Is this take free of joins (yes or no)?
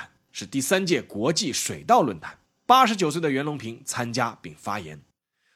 no